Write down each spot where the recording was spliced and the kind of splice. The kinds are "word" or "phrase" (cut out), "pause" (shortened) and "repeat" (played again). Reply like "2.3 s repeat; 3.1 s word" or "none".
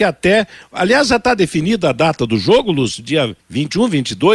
3.4 s pause